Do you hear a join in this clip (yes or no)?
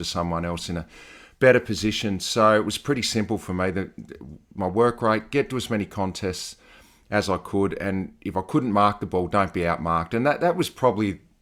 no